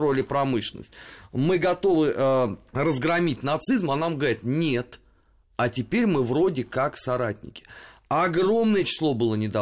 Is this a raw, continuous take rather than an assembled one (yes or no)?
yes